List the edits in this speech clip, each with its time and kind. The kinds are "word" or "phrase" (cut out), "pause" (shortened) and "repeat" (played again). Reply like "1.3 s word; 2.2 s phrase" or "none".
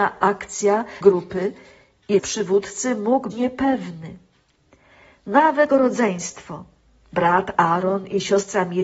1.0 s word; 2.2 s word; 3.3 s word; 5.7 s word